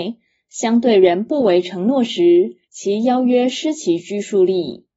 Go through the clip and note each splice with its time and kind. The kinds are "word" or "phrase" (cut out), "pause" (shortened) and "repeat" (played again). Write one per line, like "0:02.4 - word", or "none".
0:02.6 - pause